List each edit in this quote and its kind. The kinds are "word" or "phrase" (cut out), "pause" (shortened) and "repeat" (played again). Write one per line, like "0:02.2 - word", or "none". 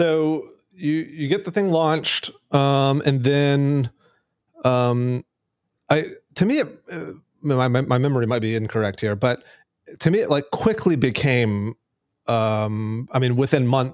none